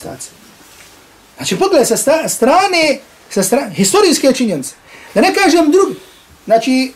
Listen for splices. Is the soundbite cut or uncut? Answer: uncut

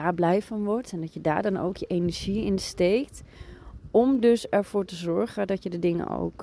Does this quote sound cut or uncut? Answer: uncut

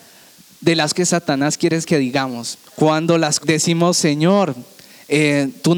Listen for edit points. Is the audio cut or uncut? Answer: cut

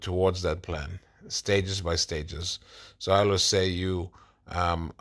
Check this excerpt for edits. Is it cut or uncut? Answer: uncut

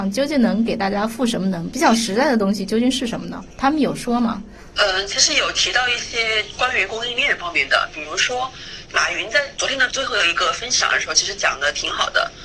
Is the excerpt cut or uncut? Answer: cut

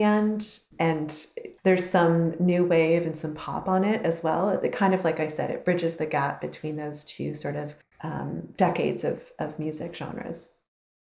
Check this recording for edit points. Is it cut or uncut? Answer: cut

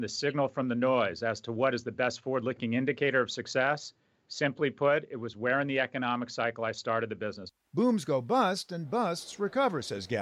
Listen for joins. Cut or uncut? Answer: uncut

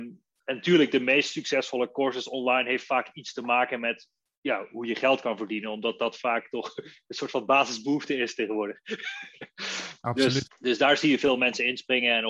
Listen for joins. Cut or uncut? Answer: cut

